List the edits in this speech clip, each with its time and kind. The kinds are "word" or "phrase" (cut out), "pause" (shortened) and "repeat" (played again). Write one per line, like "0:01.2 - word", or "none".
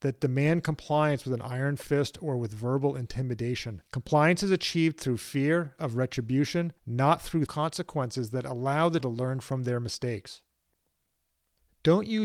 0:03.9 - pause
0:06.8 - pause
0:07.5 - word
0:09.0 - word